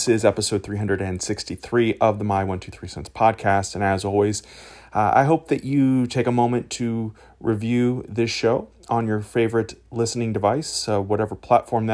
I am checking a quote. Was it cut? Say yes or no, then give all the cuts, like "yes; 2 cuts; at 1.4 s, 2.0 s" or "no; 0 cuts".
no; 0 cuts